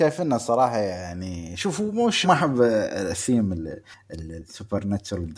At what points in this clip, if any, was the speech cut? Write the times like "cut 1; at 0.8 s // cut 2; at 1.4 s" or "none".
cut 1; at 2.2 s